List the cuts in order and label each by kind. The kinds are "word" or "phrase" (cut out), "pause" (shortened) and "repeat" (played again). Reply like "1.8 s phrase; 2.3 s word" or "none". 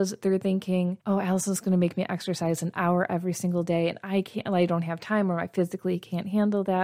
1.0 s pause